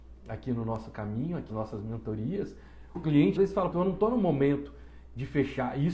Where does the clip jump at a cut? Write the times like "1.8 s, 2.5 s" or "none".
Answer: 1.5 s, 2.9 s, 3.4 s, 3.7 s

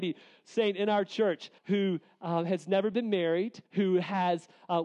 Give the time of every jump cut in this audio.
1.6 s, 3.7 s

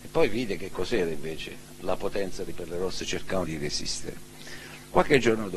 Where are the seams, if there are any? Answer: 2.5 s, 3.4 s

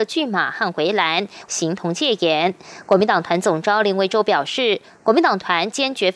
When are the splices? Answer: 1.5 s

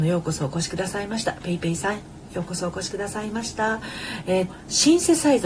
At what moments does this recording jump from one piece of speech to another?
4.5 s

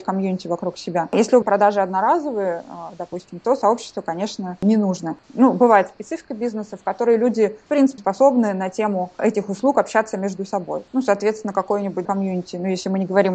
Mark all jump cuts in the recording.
1.4 s, 8.0 s, 12.0 s

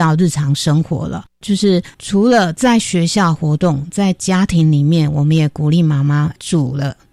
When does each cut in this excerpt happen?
1.9 s

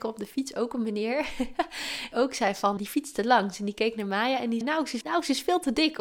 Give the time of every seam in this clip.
2.1 s, 2.8 s, 4.6 s, 5.0 s

